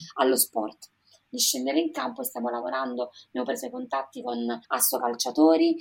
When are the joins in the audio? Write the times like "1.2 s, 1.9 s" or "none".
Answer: 4.6 s